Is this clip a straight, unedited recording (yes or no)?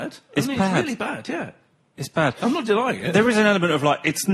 yes